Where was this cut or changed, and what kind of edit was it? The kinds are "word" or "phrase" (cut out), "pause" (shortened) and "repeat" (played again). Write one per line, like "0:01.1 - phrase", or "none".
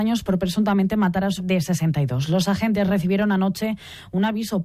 0:01.4 - word